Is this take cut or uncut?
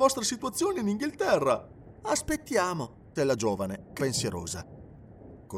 cut